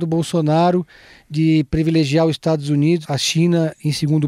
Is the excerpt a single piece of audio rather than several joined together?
no; 1 cut; at 3.0 s

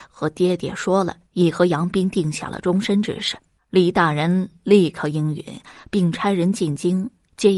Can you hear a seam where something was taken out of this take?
yes; 2 cuts; at 1.3 s, 3.6 s

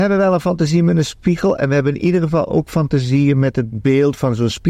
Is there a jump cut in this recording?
no; 0 cuts

